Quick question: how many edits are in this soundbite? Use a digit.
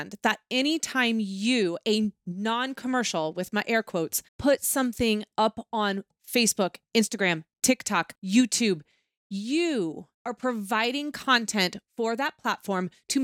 3